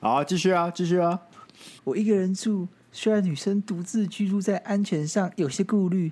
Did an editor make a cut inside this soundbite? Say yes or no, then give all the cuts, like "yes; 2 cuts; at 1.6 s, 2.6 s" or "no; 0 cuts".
yes; 1 cut; at 1.8 s